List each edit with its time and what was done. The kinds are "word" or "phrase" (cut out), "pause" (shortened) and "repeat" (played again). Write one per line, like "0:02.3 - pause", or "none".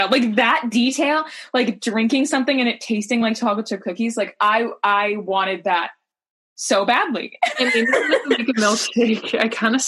none